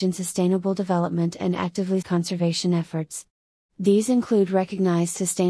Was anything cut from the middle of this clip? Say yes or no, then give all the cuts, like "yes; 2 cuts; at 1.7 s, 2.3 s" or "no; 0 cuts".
yes; 1 cut; at 2.0 s